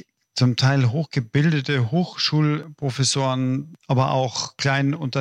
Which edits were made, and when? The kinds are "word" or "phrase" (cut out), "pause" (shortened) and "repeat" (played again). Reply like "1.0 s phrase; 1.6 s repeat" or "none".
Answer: none